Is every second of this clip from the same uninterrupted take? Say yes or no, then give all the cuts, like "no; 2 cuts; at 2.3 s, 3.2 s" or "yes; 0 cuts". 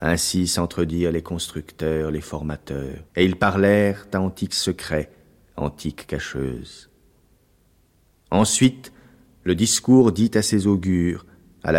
no; 1 cut; at 3.1 s